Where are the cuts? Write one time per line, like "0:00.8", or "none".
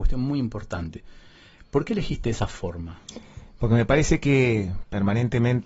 none

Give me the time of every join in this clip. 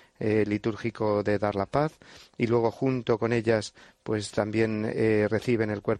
none

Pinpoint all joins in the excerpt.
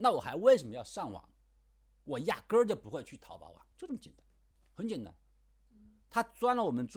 0:03.7

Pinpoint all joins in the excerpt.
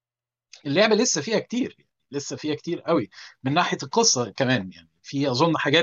none

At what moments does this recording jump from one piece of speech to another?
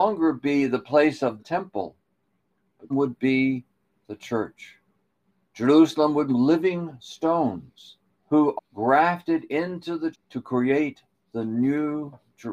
0:01.4
0:02.9
0:06.3
0:08.2
0:08.6
0:10.1

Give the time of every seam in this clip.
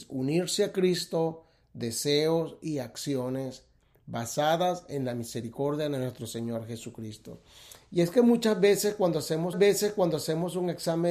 0:09.5

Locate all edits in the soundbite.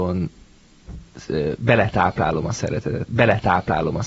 0:03.1

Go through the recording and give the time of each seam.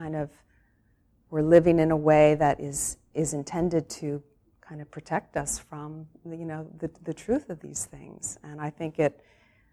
none

